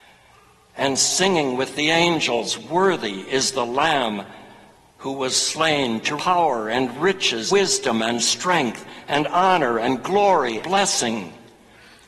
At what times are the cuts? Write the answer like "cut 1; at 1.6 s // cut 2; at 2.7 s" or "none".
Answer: cut 1; at 6.2 s // cut 2; at 7.5 s // cut 3; at 10.6 s